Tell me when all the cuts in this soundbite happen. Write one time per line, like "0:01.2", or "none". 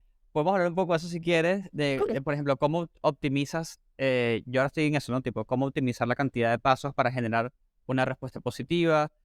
0:07.6